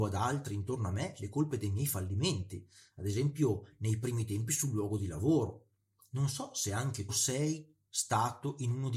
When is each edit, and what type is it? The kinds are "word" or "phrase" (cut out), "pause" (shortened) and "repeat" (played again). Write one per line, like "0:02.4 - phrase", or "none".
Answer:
0:07.1 - phrase